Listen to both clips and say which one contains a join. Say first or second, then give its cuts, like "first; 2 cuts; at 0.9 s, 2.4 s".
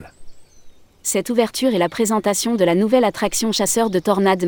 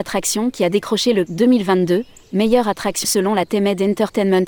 second; 2 cuts; at 1.3 s, 3.0 s